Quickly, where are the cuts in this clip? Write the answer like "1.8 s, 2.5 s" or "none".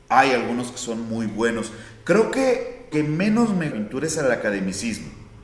2.9 s, 3.7 s